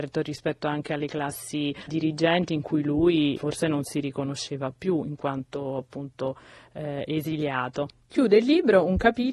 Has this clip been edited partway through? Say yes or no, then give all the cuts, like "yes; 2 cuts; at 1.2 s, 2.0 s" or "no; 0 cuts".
yes; 2 cuts; at 1.9 s, 3.3 s